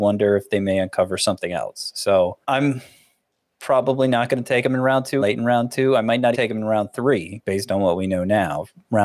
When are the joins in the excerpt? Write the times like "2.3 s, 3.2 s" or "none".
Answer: 2.4 s, 5.2 s, 6.3 s